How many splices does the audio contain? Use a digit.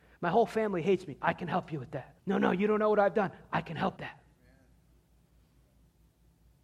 2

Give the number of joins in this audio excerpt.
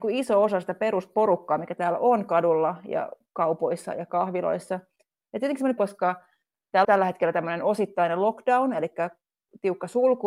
2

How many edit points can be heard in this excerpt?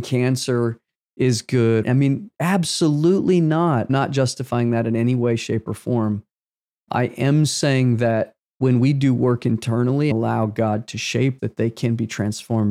4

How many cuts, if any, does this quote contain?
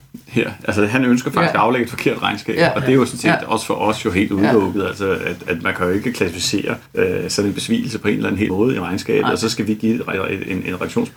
2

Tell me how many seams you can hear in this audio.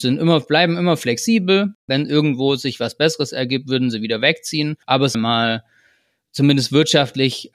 2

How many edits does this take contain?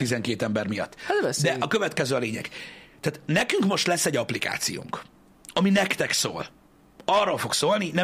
0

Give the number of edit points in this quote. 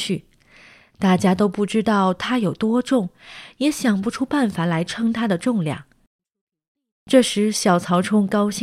0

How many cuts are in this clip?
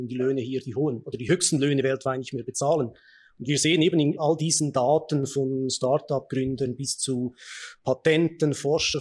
0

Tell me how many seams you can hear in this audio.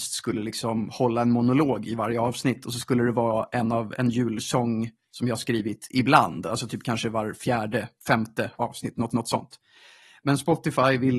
2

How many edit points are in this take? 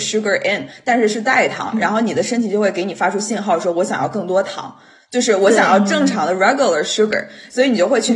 0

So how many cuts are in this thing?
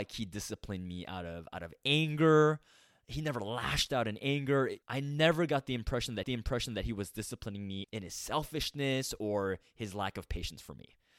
3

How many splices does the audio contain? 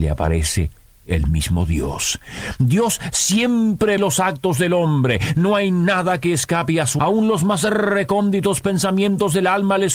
2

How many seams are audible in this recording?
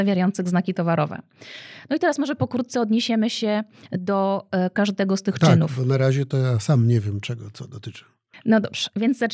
0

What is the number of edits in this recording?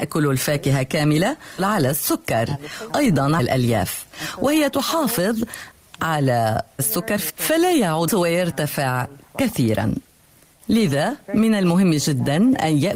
6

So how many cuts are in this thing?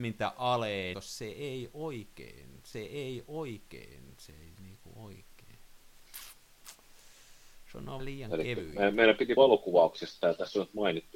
4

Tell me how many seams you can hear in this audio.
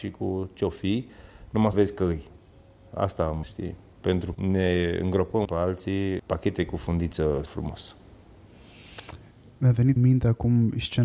7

